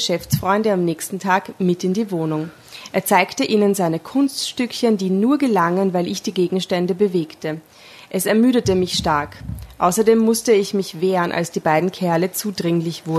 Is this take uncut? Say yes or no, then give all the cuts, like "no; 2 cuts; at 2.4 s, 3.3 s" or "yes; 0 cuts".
yes; 0 cuts